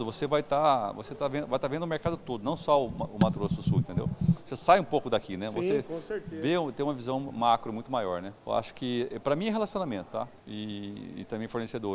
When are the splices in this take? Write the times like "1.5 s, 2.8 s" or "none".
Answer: 8.4 s, 10.4 s